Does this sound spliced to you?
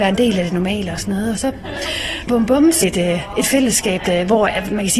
yes; 2 cuts; at 2.3 s, 2.8 s

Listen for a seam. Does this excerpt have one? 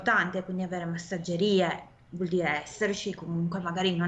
no; 0 cuts

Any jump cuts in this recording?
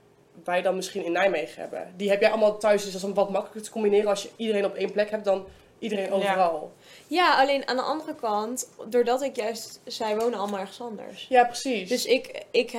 no; 0 cuts

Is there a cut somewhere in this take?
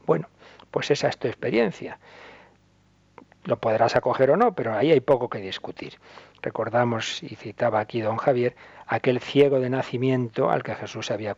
no; 0 cuts

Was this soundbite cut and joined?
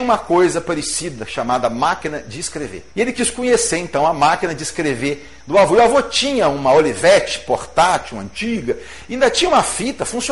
yes; 1 cut; at 2.9 s

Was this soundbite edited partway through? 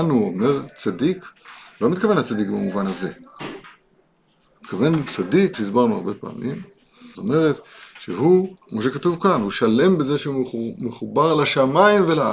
yes; 3 cuts; at 5.5 s, 7.1 s, 8.6 s

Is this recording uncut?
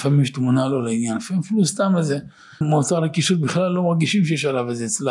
no; 1 cut; at 2.6 s

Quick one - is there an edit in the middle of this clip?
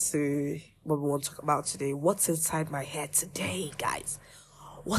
no; 0 cuts

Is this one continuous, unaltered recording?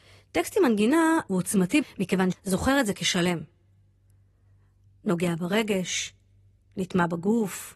no; 3 cuts; at 1.3 s, 1.8 s, 2.3 s

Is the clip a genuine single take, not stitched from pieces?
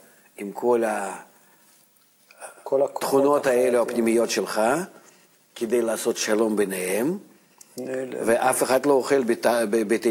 yes; 0 cuts

